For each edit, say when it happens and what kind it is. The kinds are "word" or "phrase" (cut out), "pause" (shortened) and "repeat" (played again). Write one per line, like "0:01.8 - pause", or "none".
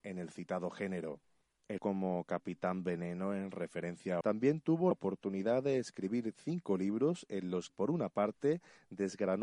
0:01.8 - word
0:04.2 - phrase
0:04.9 - word
0:07.7 - word